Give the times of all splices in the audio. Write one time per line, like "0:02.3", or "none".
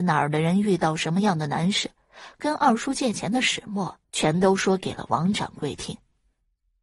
0:04.0

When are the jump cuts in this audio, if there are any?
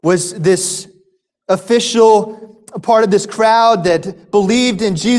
none

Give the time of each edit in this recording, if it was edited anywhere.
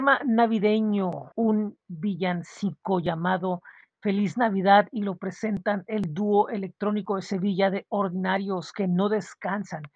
0:01.3

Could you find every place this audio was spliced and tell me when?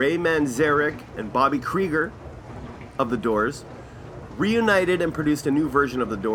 none

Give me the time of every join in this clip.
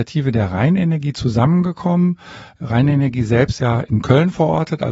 0:03.6

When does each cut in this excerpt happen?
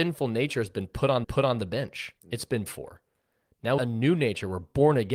0:01.2
0:02.2
0:02.7
0:03.8

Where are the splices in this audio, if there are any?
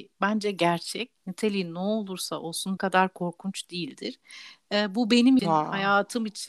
0:01.2
0:02.8
0:05.4

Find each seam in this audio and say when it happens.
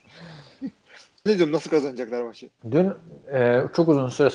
0:01.3
0:02.6

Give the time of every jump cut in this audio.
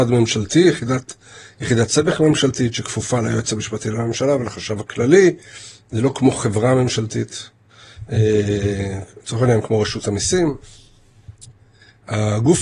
none

